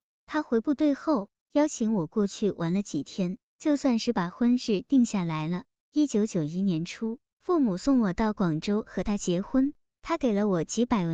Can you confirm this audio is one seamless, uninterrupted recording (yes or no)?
yes